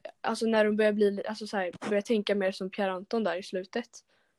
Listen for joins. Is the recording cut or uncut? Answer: uncut